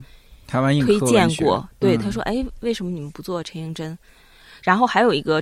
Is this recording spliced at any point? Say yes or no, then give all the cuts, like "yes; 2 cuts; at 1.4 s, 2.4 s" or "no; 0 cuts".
no; 0 cuts